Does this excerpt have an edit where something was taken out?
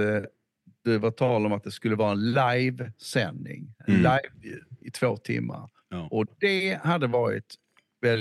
yes; 1 cut; at 4.3 s

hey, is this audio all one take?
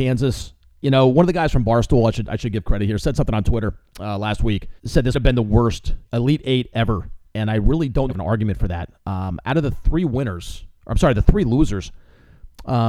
no; 6 cuts; at 4.8 s, 5.1 s, 6.0 s, 8.1 s, 9.0 s, 10.8 s

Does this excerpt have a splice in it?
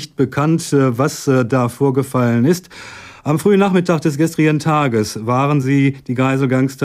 no; 0 cuts

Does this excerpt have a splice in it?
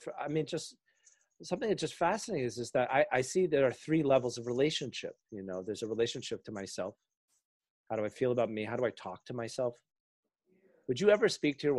no; 0 cuts

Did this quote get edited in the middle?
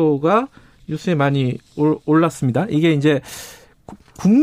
yes; 1 cut; at 1.7 s

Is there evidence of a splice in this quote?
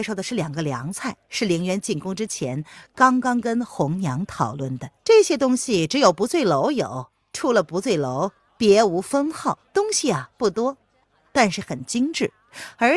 yes; 3 cuts; at 1.2 s, 5.0 s, 9.7 s

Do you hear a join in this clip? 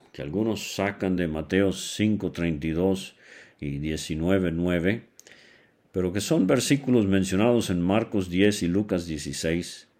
no; 0 cuts

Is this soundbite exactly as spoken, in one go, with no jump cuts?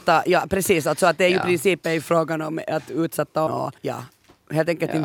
no; 2 cuts; at 3.5 s, 3.8 s

